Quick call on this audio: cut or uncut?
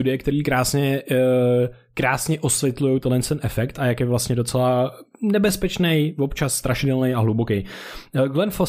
uncut